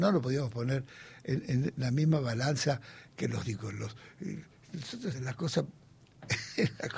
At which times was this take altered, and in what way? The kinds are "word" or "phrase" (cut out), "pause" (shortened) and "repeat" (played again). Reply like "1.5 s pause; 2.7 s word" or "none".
3.5 s word; 5.1 s word